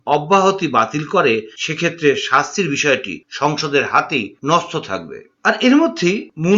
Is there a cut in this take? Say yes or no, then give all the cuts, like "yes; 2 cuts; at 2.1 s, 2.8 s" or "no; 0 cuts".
no; 0 cuts